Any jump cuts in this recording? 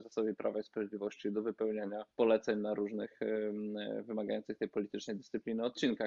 yes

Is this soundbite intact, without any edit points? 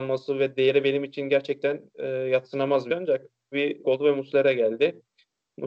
no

